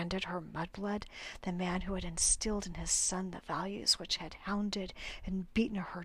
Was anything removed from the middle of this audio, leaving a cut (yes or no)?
no